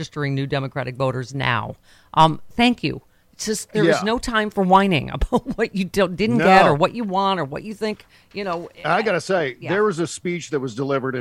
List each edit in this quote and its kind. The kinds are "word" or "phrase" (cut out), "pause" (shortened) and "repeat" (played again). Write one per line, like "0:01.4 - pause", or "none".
none